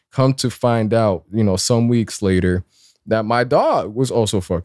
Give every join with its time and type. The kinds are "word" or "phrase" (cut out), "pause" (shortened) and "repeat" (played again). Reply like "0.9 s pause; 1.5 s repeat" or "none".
none

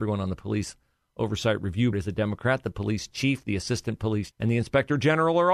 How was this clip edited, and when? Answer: 1.9 s word; 4.3 s word

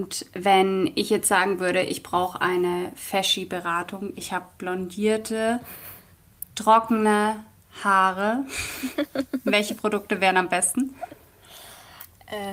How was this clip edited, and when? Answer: none

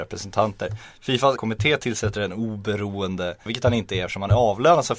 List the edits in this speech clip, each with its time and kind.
1.4 s word; 3.5 s word

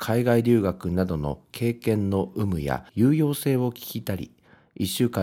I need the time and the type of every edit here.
2.9 s pause

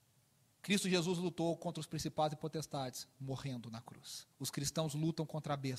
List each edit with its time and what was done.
4.3 s pause

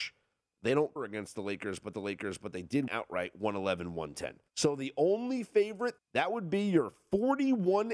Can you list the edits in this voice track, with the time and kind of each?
1.0 s word; 1.9 s repeat; 2.9 s word; 4.5 s pause; 6.0 s phrase

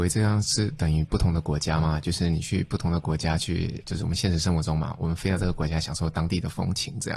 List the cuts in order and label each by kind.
3.8 s word

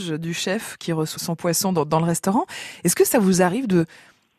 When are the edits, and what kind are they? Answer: 1.2 s word

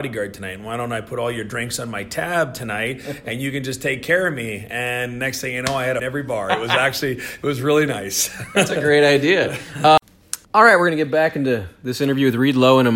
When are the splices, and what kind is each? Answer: 6.0 s phrase; 10.4 s pause

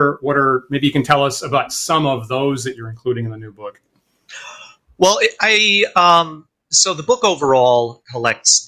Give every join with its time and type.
none

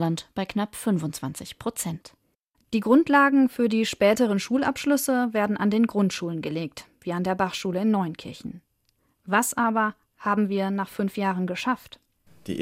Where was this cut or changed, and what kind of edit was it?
none

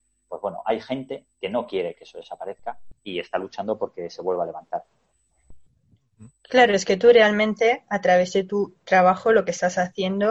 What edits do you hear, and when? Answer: 1.3 s pause; 3.0 s pause

